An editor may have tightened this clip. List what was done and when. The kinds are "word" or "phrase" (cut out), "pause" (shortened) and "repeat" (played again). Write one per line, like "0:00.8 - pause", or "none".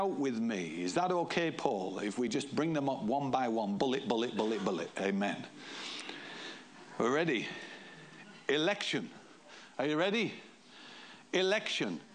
none